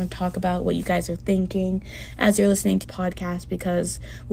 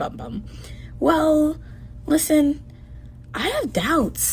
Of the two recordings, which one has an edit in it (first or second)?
first